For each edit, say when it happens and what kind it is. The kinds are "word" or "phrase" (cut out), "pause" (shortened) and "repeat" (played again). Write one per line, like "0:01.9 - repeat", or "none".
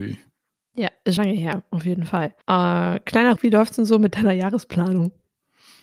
0:01.2 - word
0:02.4 - pause
0:03.4 - word